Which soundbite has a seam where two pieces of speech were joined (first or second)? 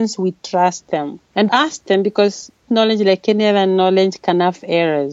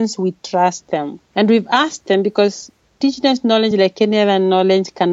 first